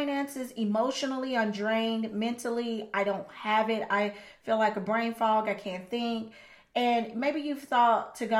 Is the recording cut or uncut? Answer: uncut